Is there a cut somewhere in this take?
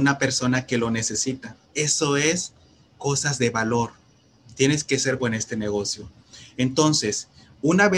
yes; 3 cuts; at 1.6 s, 2.9 s, 5.2 s

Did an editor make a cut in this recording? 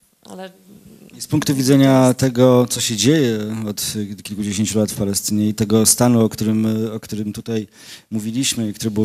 no; 0 cuts

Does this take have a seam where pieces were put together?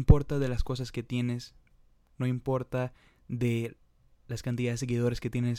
no; 0 cuts

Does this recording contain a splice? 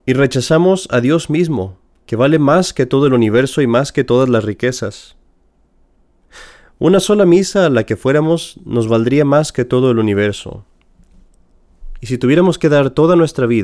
no; 0 cuts

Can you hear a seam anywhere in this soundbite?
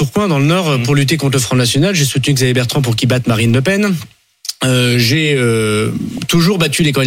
no; 0 cuts

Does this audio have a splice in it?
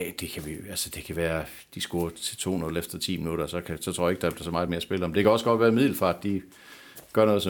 no; 0 cuts

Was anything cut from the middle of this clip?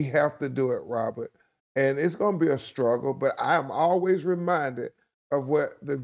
no; 0 cuts

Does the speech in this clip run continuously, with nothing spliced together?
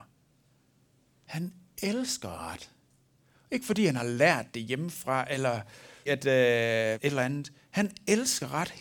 no; 2 cuts; at 6.1 s, 7.0 s

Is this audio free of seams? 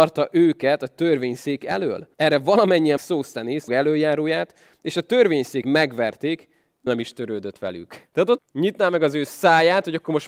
no; 7 cuts; at 2.1 s, 3.0 s, 3.7 s, 5.6 s, 6.9 s, 8.1 s, 8.4 s

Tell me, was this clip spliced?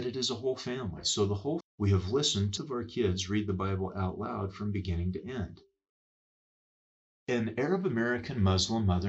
yes; 2 cuts; at 1.6 s, 2.6 s

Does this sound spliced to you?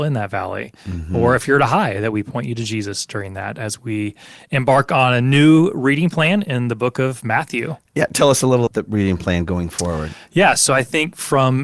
yes; 1 cut; at 8.7 s

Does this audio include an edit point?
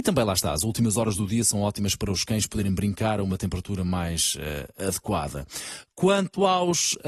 no; 0 cuts

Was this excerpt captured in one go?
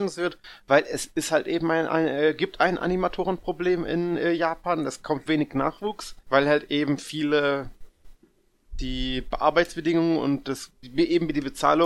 no; 2 cuts; at 5.3 s, 6.2 s

